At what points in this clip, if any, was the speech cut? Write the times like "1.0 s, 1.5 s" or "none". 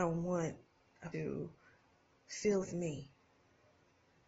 1.1 s, 2.6 s